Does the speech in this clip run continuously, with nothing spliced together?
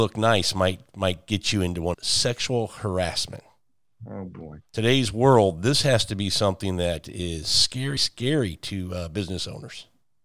no; 3 cuts; at 1.9 s, 4.7 s, 8.0 s

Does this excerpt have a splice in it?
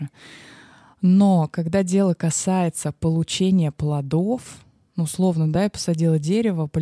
no; 0 cuts

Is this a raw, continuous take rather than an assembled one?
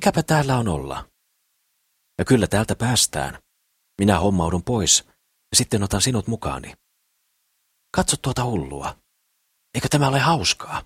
yes; 0 cuts

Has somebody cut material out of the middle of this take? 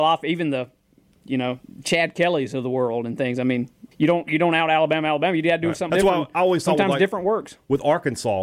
yes; 2 cuts; at 3.9 s, 5.9 s

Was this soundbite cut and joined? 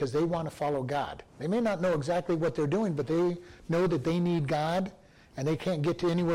no; 0 cuts

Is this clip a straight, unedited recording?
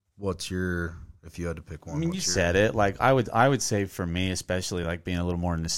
yes; 0 cuts

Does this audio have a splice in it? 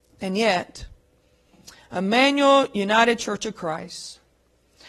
no; 0 cuts

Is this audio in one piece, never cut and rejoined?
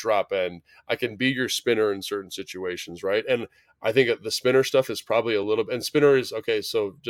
yes; 0 cuts

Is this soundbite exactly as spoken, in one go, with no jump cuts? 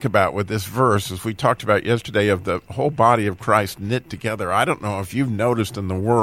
yes; 0 cuts

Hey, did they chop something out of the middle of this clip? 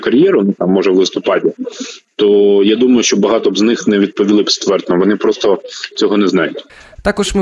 no; 0 cuts

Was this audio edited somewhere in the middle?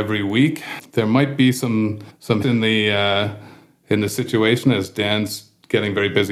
yes; 1 cut; at 2.4 s

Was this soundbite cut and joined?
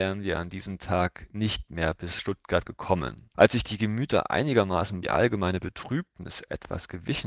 yes; 1 cut; at 5.0 s

